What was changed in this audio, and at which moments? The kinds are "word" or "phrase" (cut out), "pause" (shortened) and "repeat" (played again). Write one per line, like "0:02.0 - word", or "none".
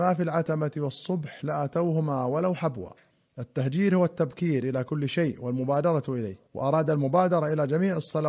0:03.1 - pause
0:06.5 - pause